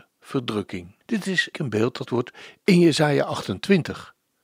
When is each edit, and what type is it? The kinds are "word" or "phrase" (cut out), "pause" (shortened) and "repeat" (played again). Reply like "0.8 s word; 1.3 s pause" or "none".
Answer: 1.0 s pause; 1.5 s word; 2.1 s word